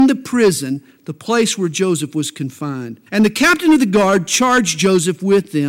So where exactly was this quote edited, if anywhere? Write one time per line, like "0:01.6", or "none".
0:03.1